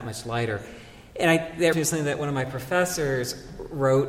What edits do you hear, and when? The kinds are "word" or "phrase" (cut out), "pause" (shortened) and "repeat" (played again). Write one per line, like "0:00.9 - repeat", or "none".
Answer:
0:01.7 - word